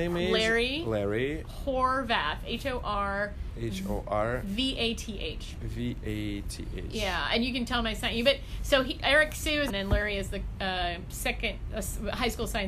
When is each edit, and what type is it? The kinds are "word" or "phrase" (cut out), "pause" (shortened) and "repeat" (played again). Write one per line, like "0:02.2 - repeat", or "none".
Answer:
0:09.7 - phrase